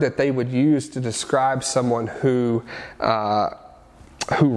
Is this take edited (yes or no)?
no